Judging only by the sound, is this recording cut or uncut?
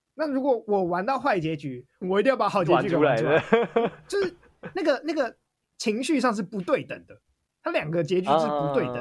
cut